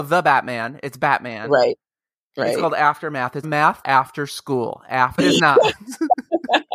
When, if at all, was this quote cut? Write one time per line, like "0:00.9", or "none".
0:03.4
0:03.8
0:05.2